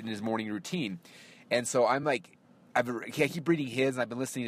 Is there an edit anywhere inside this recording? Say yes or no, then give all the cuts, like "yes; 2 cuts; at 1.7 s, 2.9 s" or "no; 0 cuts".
no; 0 cuts